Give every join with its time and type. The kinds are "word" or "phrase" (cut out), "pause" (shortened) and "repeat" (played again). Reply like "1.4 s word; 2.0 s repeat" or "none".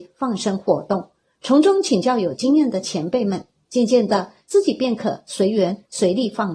none